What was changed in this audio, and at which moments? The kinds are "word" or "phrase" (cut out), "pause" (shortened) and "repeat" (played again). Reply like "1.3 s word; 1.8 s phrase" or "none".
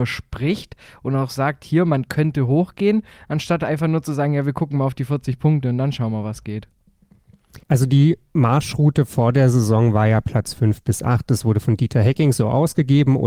7.6 s pause